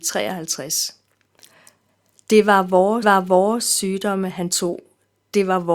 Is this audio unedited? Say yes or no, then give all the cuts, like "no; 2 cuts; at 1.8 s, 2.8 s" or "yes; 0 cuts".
no; 1 cut; at 3.0 s